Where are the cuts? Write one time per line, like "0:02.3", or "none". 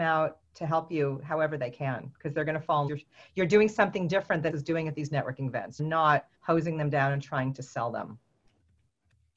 0:02.9
0:04.5
0:05.8
0:06.3